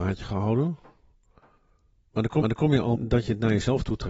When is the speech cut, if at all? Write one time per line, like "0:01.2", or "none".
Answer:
0:02.4
0:03.0